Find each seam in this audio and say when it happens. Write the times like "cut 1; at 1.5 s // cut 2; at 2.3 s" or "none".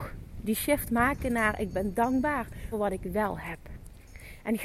cut 1; at 2.7 s